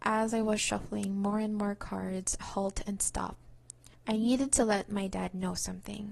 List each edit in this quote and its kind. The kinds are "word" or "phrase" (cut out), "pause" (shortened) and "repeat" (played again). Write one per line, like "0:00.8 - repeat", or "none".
0:02.4 - phrase
0:03.9 - pause